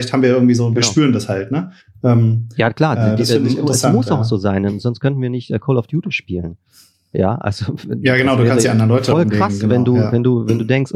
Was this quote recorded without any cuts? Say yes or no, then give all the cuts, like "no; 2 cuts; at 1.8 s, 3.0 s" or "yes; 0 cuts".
no; 2 cuts; at 1.8 s, 8.6 s